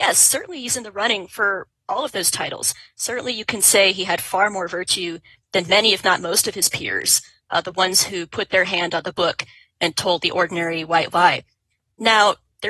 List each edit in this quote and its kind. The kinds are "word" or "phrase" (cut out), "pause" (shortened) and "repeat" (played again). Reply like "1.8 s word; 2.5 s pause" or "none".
none